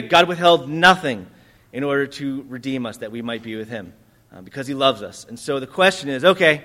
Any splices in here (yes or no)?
no